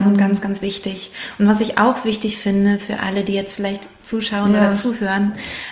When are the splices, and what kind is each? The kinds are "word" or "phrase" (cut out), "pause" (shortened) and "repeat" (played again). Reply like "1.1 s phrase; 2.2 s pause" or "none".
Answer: none